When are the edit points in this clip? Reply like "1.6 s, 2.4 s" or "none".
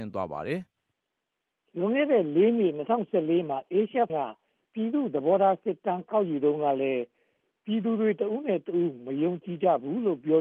4.1 s